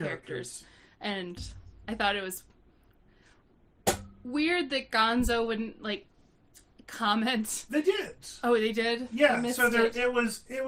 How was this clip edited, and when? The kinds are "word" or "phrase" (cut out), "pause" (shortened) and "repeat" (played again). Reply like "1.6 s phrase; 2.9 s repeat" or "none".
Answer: none